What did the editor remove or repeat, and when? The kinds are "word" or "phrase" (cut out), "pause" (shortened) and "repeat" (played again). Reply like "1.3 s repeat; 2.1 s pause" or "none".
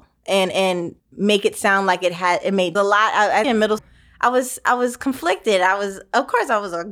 1.0 s pause; 2.7 s phrase; 3.4 s word; 3.8 s word